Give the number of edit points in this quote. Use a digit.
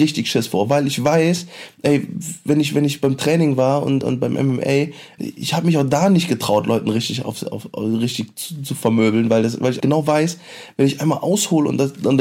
3